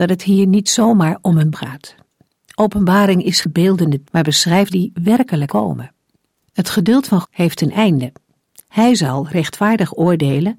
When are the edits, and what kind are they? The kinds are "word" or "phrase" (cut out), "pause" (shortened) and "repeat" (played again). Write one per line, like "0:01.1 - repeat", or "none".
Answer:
0:01.5 - word
0:03.4 - word
0:04.0 - word
0:04.7 - word
0:05.5 - word
0:07.2 - word